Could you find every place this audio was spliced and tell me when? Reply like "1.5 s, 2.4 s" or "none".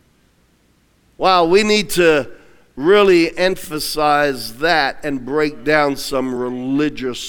none